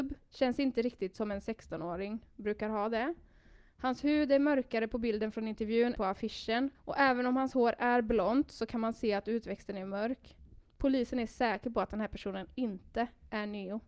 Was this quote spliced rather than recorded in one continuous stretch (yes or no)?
yes